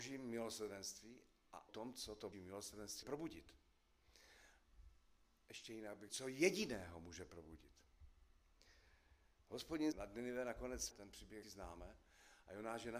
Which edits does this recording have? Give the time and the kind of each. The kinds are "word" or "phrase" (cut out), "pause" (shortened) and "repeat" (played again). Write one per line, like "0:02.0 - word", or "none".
0:01.7 - word
0:02.3 - word
0:03.0 - word
0:06.1 - word
0:09.9 - word
0:10.9 - word
0:11.4 - word